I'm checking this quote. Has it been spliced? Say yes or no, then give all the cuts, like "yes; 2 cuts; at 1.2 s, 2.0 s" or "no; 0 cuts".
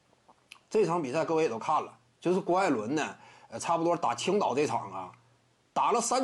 no; 0 cuts